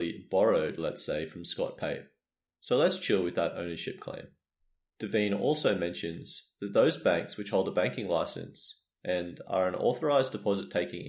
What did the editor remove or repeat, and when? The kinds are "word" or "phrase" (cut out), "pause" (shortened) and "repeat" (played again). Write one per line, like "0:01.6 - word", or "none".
none